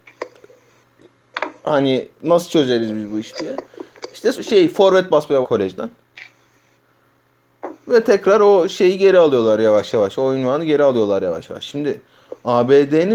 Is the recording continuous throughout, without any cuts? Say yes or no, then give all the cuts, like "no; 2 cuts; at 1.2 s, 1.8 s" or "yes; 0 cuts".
no; 3 cuts; at 2.1 s, 4.3 s, 5.4 s